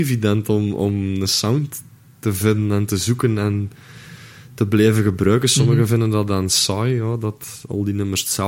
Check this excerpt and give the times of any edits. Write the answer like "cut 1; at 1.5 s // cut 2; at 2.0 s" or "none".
none